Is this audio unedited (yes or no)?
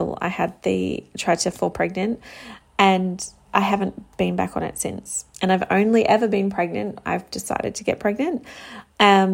no